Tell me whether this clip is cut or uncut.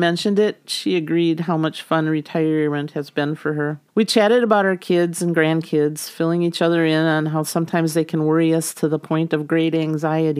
cut